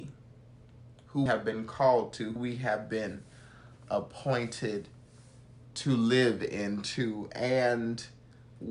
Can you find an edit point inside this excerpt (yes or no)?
yes